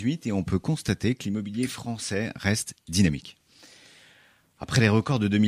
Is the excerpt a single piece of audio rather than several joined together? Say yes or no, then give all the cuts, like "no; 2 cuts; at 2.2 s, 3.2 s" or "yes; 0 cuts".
yes; 0 cuts